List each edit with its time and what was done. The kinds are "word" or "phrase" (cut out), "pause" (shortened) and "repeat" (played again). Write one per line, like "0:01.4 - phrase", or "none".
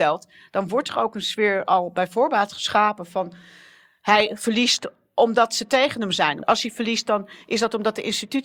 none